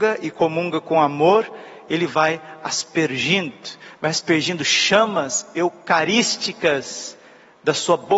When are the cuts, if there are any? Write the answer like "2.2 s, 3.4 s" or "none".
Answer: none